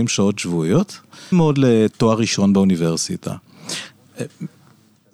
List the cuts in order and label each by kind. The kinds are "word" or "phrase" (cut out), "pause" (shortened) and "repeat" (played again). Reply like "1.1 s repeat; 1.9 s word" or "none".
1.3 s word